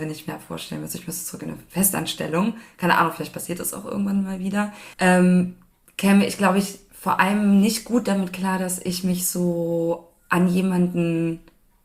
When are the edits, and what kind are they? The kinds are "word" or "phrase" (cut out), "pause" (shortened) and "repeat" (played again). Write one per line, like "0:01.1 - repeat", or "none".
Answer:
0:04.9 - pause